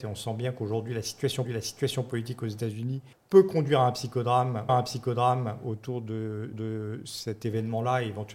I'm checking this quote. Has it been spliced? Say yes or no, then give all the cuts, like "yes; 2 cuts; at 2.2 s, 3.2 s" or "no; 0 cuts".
yes; 4 cuts; at 1.4 s, 3.1 s, 4.7 s, 6.5 s